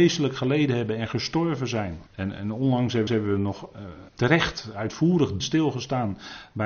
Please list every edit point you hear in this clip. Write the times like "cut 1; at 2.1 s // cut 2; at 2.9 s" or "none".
cut 1; at 2.1 s // cut 2; at 3.1 s // cut 3; at 4.1 s // cut 4; at 5.4 s